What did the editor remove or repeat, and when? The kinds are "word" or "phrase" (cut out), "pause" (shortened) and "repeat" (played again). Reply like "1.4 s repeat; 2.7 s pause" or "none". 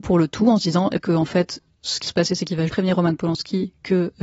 1.0 s word; 2.1 s word; 2.7 s word